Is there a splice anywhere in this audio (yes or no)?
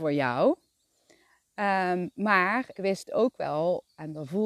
yes